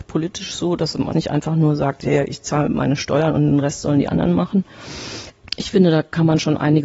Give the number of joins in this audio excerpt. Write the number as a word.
one